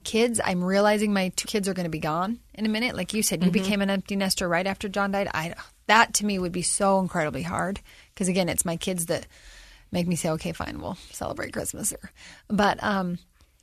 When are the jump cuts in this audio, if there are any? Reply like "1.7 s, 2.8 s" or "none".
1.4 s, 11.9 s